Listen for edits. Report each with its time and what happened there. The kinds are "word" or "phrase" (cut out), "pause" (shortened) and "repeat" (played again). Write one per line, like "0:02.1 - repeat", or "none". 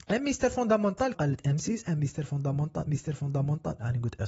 0:01.1 - word
0:02.9 - repeat